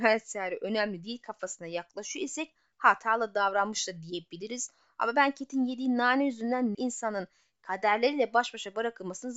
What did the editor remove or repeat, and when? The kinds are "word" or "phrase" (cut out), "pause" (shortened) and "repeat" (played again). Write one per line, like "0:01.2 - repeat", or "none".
0:06.7 - phrase

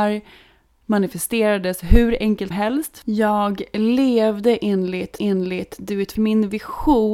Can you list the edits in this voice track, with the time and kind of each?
0:02.5 - word
0:05.2 - repeat
0:06.2 - phrase

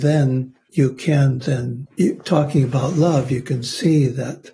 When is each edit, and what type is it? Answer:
none

